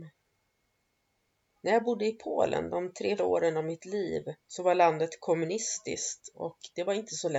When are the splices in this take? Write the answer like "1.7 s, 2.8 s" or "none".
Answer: 3.2 s, 4.4 s